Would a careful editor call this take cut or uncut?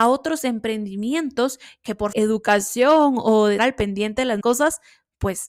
cut